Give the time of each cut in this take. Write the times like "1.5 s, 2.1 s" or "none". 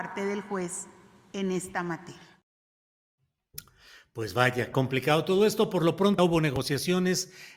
4.7 s, 6.2 s